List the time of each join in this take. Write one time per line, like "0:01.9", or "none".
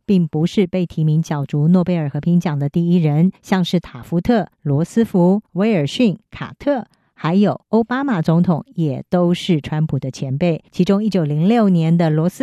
0:03.4
0:04.5
0:05.5
0:06.2
0:07.6
0:10.7